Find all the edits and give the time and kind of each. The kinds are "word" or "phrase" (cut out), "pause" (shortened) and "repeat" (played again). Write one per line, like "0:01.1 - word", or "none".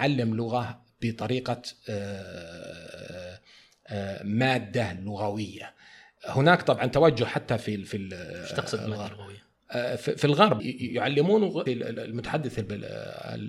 0:10.6 - word
0:11.7 - word